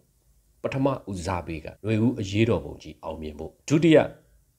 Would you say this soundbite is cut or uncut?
cut